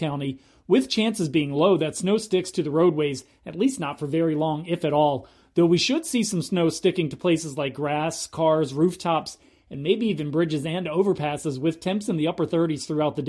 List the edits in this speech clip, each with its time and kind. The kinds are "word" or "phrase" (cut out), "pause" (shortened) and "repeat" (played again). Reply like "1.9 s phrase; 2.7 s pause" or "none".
none